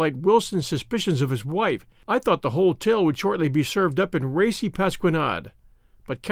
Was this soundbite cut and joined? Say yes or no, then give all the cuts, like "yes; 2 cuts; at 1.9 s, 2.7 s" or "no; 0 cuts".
no; 0 cuts